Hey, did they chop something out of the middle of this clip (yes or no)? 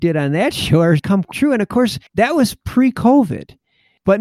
yes